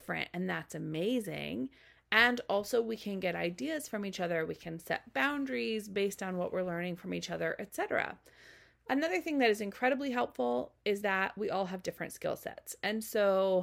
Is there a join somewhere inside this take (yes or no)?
no